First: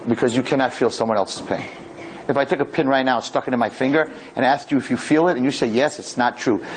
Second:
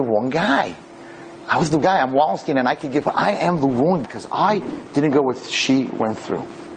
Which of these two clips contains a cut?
second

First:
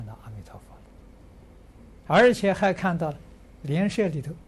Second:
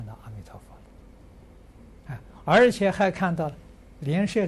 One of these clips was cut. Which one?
first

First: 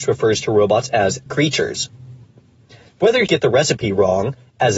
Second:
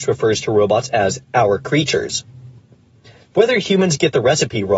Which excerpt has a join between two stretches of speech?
first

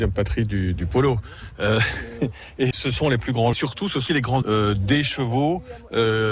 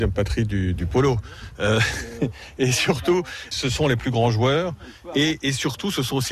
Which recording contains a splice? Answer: first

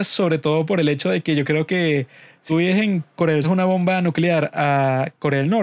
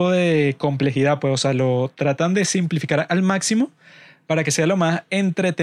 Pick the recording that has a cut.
first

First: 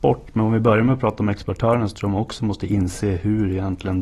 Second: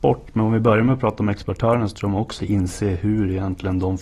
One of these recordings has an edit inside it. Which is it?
second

